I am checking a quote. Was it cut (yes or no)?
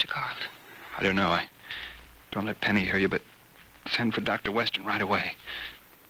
no